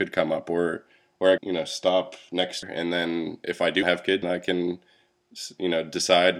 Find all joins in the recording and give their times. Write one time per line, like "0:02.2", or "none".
0:01.4
0:02.6
0:03.8
0:04.2